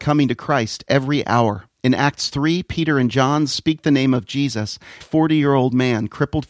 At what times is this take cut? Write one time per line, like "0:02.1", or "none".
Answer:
0:01.7
0:05.0